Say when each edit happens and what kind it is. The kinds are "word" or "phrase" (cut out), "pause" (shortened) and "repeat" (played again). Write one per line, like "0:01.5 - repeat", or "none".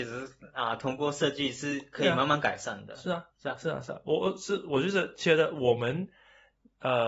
0:03.3 - pause

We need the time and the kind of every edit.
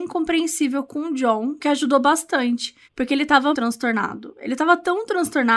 0:01.6 - word
0:02.8 - pause
0:03.5 - word

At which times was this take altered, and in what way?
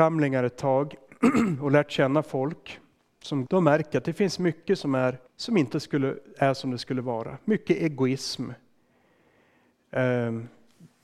0:03.4 - phrase
0:05.3 - pause

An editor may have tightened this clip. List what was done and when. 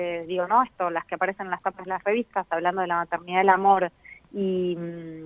none

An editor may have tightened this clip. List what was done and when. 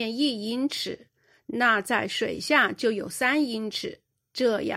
none

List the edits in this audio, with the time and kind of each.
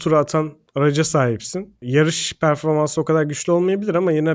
none

